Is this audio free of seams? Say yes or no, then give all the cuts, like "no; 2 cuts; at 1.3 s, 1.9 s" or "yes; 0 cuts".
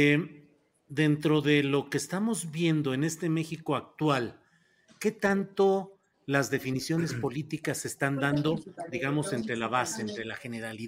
yes; 0 cuts